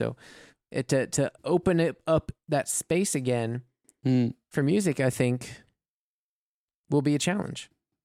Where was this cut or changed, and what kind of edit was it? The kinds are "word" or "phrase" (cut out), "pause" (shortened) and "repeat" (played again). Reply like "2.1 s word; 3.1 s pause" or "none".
none